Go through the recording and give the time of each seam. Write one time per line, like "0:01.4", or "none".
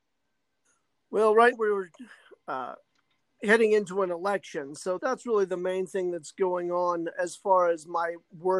0:01.5
0:05.0
0:07.1